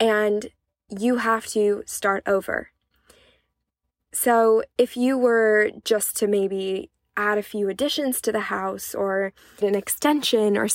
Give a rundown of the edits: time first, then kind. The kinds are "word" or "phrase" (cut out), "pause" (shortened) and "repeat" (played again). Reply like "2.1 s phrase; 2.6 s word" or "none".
9.6 s word